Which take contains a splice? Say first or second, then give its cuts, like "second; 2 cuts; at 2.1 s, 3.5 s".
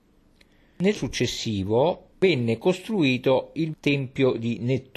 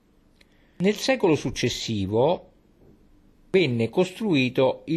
first; 3 cuts; at 0.9 s, 2.1 s, 3.7 s